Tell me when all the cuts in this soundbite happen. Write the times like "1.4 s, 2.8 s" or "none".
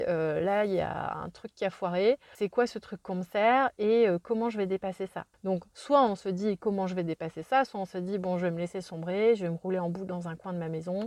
none